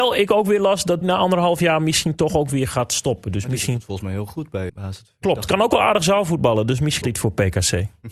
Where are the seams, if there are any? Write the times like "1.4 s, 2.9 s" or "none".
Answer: 1.0 s, 4.7 s, 7.0 s